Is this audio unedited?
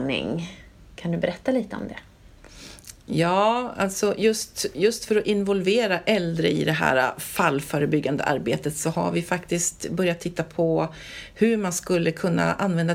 yes; 0 cuts

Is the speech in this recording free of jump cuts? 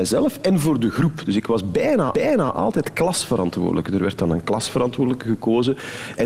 no; 1 cut; at 2.1 s

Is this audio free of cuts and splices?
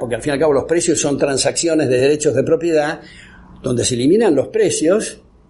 yes; 0 cuts

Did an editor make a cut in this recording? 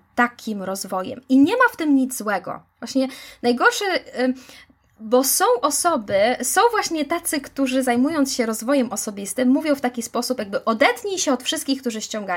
no; 0 cuts

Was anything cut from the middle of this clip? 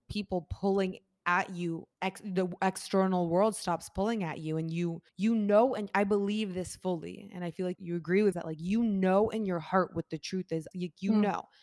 yes; 5 cuts; at 1.9 s, 5.1 s, 7.8 s, 8.3 s, 10.7 s

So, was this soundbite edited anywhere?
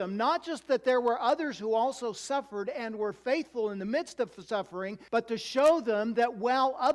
yes; 1 cut; at 5.1 s

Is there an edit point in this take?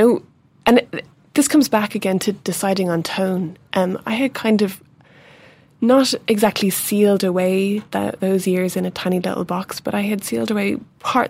no; 0 cuts

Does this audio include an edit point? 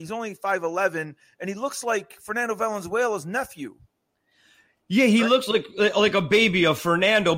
no; 0 cuts

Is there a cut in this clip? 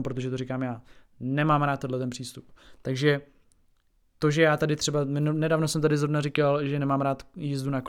no; 0 cuts

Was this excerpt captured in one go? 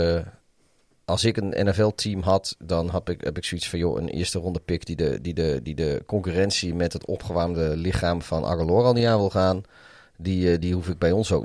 yes; 0 cuts

